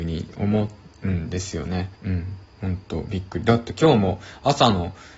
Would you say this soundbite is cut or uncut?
cut